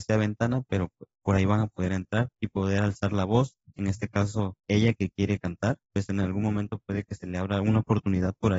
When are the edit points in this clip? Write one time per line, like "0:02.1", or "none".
0:02.3
0:04.6
0:05.8

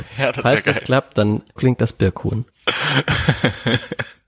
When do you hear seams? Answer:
0:01.6
0:02.5

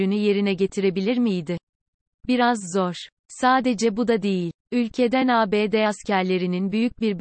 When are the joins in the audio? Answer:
none

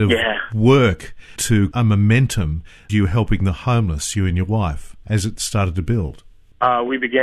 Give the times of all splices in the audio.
0:01.4
0:01.7
0:02.9

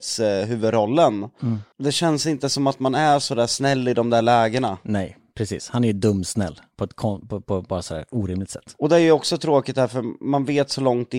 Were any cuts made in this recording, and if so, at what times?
0:01.7
0:06.7

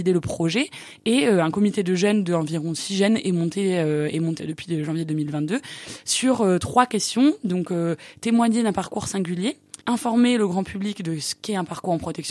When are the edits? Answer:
0:04.4
0:09.8

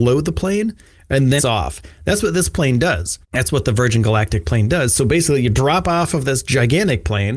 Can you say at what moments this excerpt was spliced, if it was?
0:01.4
0:03.2

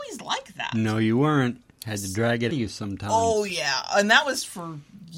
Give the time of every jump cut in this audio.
0:02.5

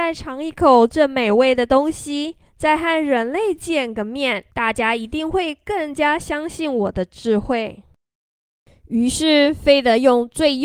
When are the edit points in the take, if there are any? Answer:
0:02.5
0:04.5

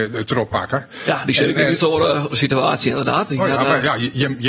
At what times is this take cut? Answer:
0:02.3

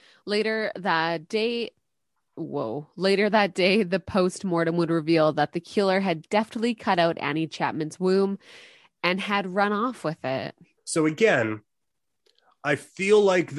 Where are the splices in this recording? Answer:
0:10.8

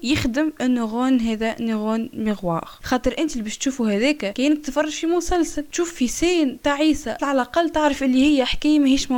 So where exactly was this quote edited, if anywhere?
0:07.2

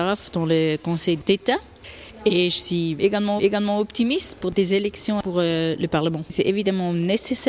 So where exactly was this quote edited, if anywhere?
0:03.4

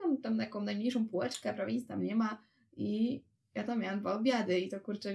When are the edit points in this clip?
none

